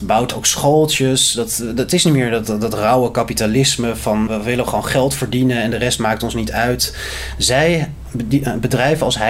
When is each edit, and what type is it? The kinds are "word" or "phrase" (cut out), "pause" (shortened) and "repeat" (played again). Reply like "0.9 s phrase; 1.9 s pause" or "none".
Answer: 2.4 s word; 4.3 s word